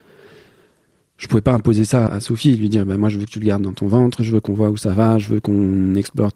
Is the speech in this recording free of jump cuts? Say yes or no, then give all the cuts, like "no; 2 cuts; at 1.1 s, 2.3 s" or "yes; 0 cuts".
no; 1 cut; at 2.1 s